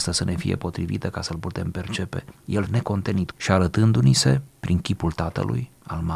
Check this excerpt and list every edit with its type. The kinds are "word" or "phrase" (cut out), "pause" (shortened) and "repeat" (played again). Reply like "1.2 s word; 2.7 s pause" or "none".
2.7 s word; 3.3 s phrase